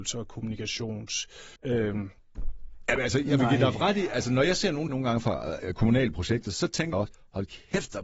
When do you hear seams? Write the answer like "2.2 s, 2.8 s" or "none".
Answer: 1.6 s, 4.9 s, 6.9 s